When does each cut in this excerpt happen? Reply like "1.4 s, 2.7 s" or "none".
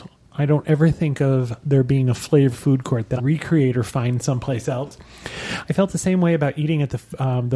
2.5 s, 3.2 s